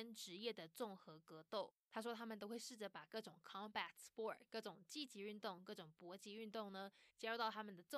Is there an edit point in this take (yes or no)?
no